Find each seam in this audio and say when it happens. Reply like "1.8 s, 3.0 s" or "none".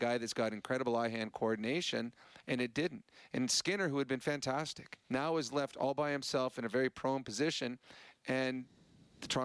5.0 s